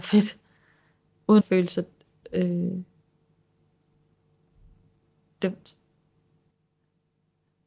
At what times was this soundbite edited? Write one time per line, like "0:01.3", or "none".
0:01.4

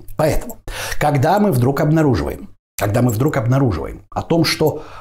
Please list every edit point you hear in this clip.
none

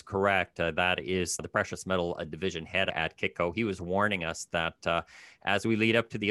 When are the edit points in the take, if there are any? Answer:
none

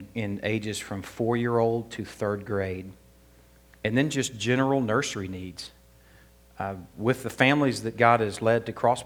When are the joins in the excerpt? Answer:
none

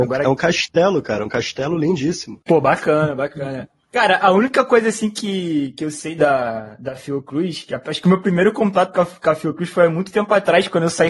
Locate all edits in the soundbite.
0:02.4

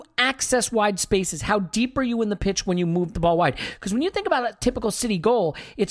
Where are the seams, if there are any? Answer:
0:03.1

